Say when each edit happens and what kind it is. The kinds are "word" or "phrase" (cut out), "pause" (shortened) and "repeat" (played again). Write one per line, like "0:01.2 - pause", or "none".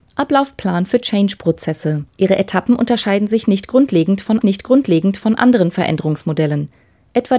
0:02.1 - pause
0:04.4 - repeat